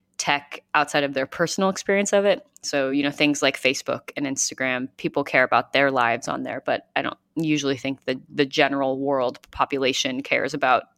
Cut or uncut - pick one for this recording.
uncut